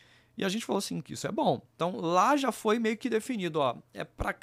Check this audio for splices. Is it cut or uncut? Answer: cut